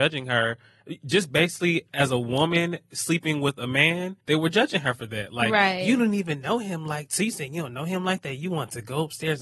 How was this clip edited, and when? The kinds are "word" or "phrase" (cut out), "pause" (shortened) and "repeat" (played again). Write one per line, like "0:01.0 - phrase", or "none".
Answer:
0:04.2 - pause